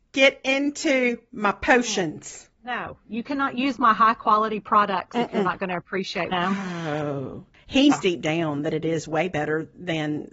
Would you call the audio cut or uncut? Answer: cut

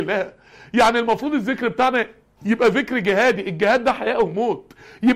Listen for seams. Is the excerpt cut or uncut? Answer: uncut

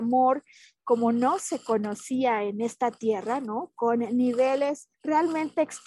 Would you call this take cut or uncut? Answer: cut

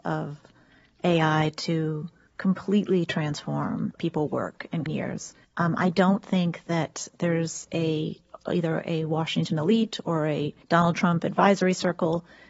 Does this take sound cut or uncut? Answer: cut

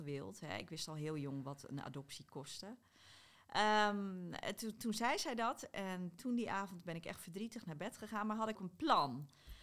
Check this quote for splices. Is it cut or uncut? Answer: cut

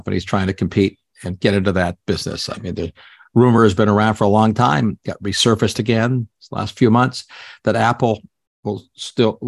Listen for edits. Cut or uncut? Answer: uncut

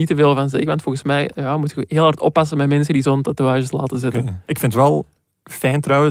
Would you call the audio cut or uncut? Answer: uncut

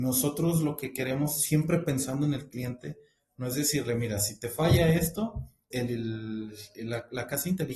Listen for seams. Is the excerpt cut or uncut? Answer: cut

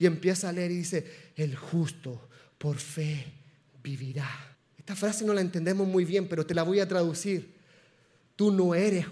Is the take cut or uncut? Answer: cut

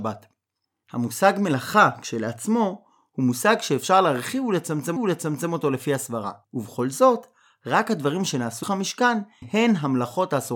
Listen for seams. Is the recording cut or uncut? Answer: cut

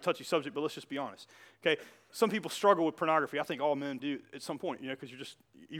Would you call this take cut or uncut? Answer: cut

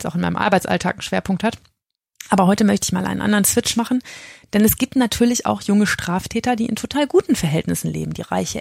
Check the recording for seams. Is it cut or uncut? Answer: uncut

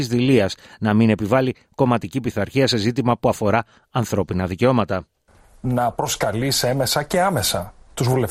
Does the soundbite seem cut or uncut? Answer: uncut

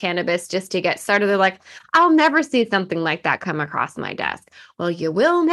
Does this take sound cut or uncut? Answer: uncut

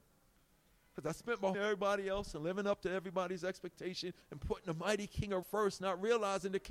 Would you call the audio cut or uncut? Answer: cut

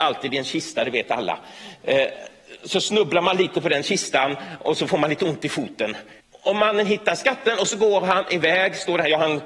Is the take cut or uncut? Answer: cut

